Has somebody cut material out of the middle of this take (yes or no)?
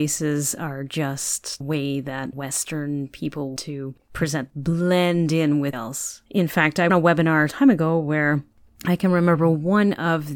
yes